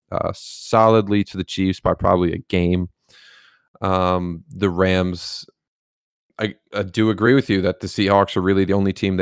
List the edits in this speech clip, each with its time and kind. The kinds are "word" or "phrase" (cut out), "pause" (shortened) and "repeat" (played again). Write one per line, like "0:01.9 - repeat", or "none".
none